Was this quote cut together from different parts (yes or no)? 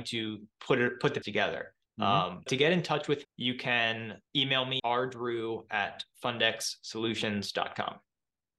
yes